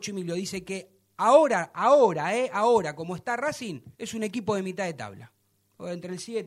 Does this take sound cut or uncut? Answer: cut